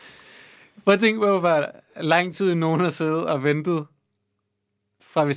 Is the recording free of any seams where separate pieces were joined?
yes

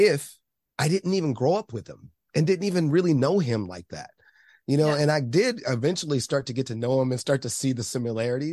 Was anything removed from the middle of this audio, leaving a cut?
no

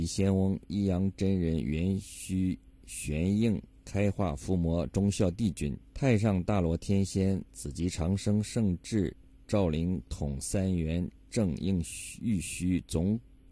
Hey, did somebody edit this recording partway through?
yes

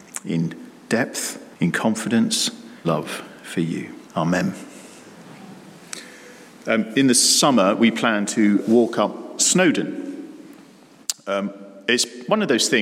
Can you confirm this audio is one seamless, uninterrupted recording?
no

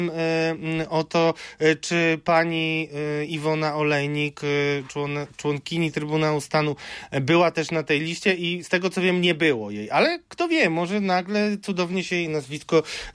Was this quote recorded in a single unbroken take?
yes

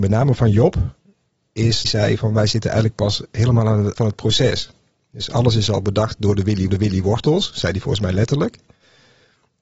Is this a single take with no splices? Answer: no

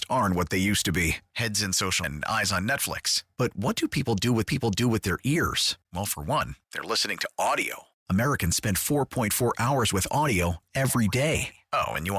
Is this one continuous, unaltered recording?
no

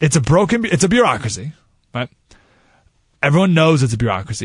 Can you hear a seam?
no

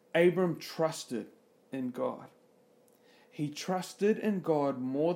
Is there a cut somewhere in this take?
no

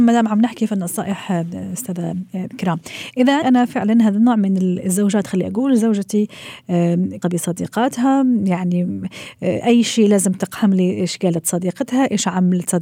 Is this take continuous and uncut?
no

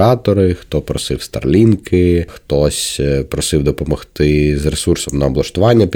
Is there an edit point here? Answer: no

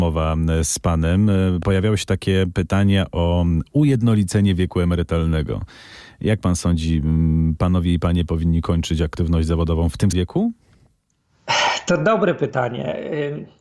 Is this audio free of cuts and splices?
no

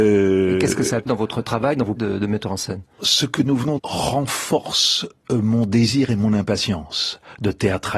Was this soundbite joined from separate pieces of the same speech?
yes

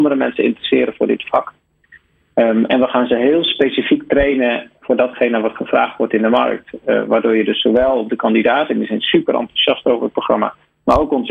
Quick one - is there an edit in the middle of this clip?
no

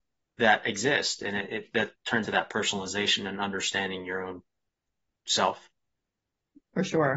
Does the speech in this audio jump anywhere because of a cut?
yes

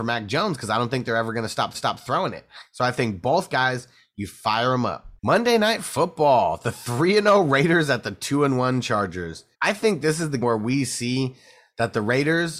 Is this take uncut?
no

